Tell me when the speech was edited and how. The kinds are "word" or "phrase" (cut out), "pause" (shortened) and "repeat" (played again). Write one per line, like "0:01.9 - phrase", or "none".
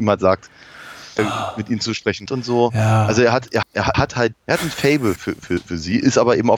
0:01.2 - word
0:02.3 - word
0:03.6 - word
0:03.9 - word
0:04.3 - word
0:05.2 - word